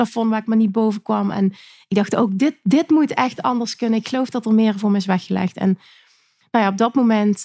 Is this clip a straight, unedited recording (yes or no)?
yes